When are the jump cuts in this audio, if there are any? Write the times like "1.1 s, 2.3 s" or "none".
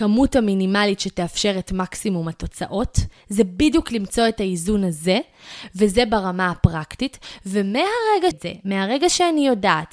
8.3 s